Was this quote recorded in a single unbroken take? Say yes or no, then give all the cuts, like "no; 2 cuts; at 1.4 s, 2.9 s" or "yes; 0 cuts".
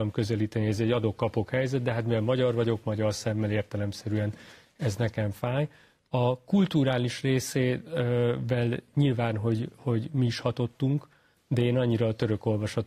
yes; 0 cuts